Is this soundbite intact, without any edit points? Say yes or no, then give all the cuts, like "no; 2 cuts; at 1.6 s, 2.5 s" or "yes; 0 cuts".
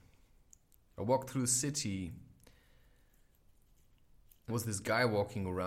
no; 1 cut; at 4.5 s